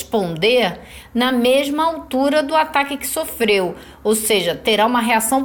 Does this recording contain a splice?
no; 0 cuts

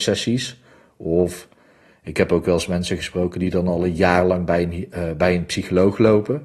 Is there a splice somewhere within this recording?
no; 0 cuts

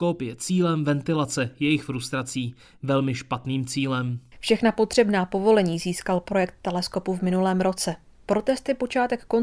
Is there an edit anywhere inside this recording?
no; 0 cuts

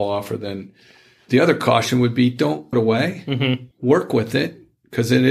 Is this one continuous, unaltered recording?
no; 3 cuts; at 1.3 s, 2.7 s, 3.7 s

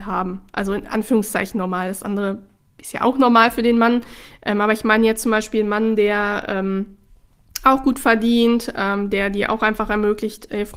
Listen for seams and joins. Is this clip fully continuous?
yes; 0 cuts

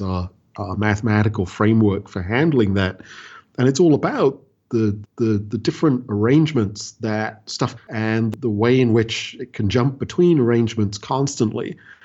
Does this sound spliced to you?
yes; 2 cuts; at 5.0 s, 7.8 s

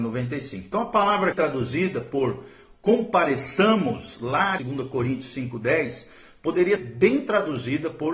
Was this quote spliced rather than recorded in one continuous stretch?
yes; 3 cuts; at 1.3 s, 4.6 s, 6.8 s

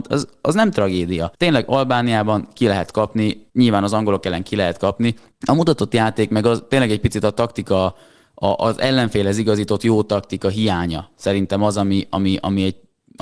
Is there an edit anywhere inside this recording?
yes; 3 cuts; at 1.3 s, 3.5 s, 5.3 s

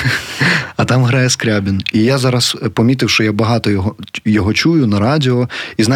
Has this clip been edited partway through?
no; 0 cuts

